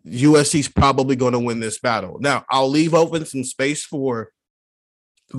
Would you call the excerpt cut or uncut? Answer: uncut